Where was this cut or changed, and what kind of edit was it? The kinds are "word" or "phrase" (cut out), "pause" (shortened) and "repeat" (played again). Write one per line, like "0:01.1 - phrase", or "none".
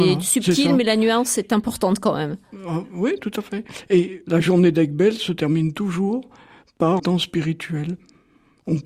0:07.0 - word

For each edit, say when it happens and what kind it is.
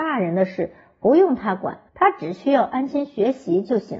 0:01.9 - pause

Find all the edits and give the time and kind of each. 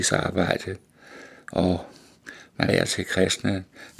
0:02.7 - word

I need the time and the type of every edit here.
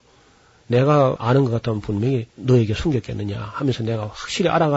0:02.3 - pause

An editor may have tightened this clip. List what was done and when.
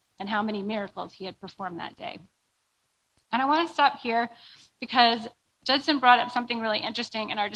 none

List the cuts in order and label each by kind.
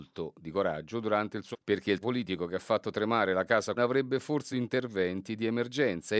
0:01.5 - word
0:02.0 - word
0:03.8 - word
0:04.5 - word

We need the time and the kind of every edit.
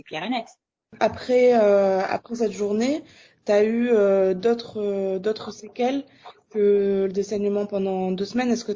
none

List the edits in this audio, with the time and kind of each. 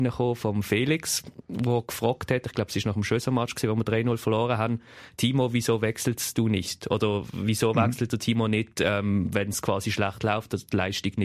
none

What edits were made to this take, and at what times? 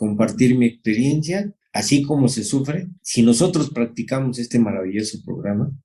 0:01.6 - pause
0:03.0 - pause

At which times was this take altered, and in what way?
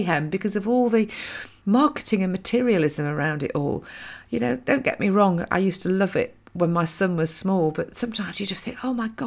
none

